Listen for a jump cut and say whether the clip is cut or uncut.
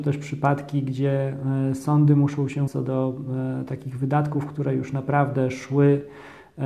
cut